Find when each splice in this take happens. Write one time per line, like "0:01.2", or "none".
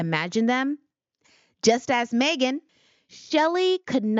none